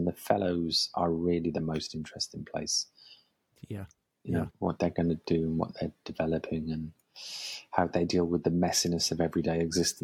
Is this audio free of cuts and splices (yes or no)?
yes